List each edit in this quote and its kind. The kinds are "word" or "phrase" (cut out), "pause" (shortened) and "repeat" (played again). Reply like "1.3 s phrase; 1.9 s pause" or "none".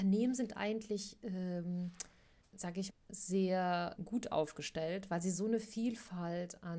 2.4 s pause; 2.9 s word; 4.0 s word